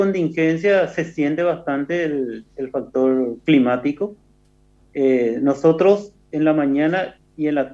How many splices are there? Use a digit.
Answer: 0